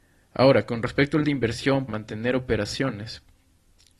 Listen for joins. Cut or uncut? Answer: cut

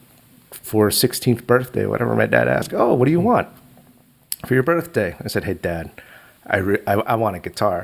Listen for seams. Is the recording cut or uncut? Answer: uncut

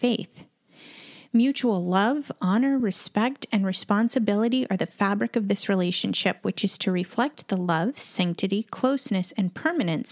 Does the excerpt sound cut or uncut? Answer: uncut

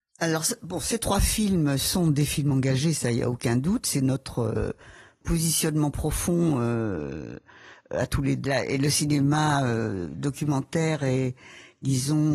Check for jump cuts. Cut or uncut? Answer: cut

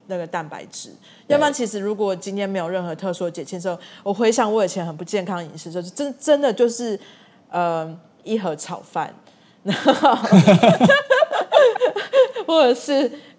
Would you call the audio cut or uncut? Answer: uncut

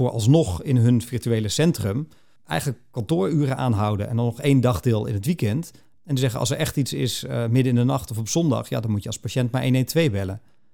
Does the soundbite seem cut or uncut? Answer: uncut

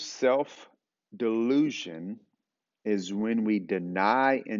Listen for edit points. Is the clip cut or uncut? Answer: uncut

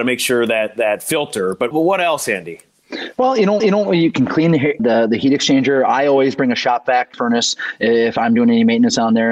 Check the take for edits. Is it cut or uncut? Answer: cut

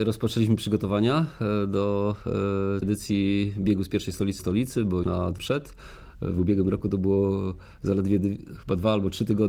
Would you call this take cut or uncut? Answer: cut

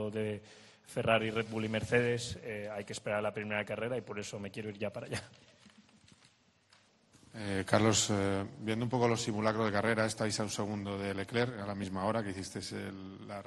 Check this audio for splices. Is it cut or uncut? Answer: uncut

